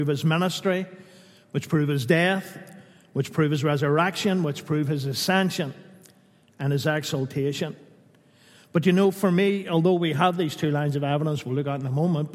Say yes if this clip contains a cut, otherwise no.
no